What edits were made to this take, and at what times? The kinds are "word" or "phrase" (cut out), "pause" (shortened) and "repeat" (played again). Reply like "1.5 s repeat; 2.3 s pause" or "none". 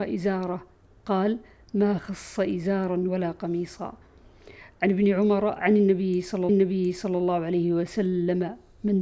6.5 s repeat